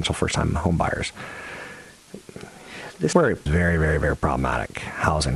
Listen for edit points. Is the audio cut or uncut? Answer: cut